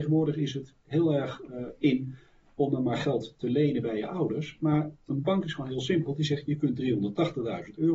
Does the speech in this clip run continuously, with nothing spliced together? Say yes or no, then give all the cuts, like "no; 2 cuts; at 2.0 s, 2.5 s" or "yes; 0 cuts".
yes; 0 cuts